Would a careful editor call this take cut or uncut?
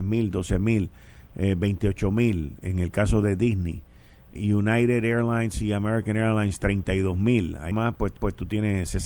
cut